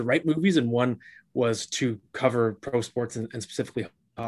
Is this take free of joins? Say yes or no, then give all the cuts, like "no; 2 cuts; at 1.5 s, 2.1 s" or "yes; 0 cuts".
yes; 0 cuts